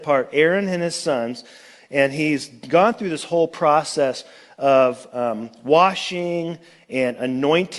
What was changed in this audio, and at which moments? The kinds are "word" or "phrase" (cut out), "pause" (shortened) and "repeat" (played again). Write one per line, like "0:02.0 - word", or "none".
none